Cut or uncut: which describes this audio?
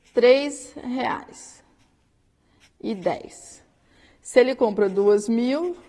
uncut